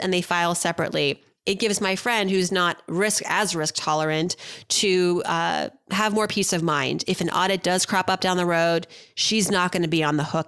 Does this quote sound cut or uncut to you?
uncut